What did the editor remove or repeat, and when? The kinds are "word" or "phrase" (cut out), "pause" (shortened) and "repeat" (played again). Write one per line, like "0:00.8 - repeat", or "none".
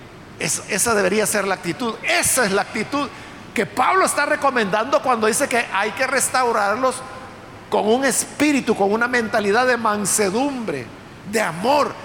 none